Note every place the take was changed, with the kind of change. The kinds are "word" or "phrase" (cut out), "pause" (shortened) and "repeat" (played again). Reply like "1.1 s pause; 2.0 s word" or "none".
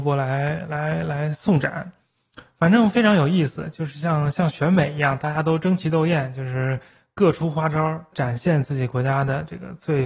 8.1 s word